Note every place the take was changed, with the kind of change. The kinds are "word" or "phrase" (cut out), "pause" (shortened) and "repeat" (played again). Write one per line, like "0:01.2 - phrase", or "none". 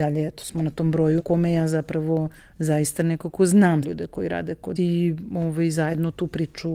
0:01.2 - word
0:02.4 - pause
0:03.8 - word
0:04.8 - word